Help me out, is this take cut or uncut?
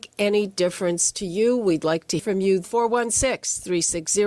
cut